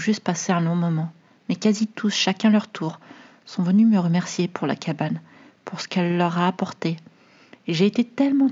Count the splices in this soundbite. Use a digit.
0